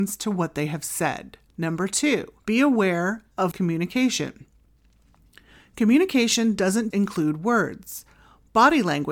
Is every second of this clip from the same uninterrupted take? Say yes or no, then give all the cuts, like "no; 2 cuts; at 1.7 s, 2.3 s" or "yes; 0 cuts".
no; 4 cuts; at 1.5 s, 2.4 s, 3.5 s, 6.9 s